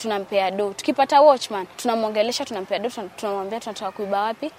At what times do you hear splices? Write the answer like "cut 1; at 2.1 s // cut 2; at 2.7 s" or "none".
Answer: cut 1; at 1.7 s